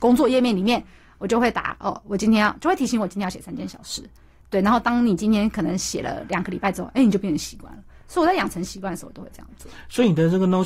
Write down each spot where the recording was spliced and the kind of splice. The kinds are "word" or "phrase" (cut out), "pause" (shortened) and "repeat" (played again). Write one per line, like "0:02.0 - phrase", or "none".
none